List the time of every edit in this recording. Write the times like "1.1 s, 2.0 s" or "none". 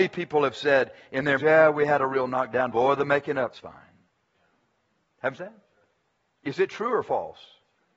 1.4 s, 2.7 s, 3.5 s, 5.4 s